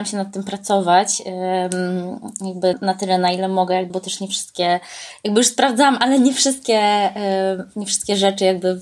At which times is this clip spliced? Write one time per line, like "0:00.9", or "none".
0:02.7
0:03.9